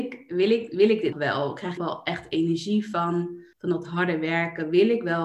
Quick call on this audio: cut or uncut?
cut